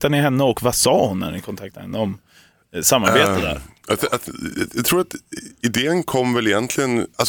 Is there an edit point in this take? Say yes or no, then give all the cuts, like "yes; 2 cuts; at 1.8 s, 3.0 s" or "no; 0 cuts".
no; 0 cuts